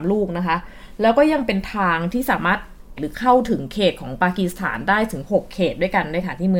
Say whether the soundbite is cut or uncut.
cut